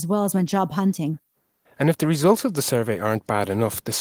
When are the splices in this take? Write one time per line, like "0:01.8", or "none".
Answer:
none